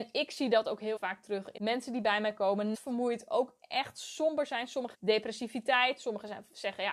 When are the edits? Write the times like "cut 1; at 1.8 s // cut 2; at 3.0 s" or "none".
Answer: cut 1; at 1.0 s // cut 2; at 1.6 s // cut 3; at 2.7 s // cut 4; at 4.9 s